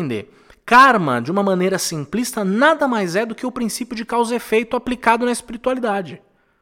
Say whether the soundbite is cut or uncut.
uncut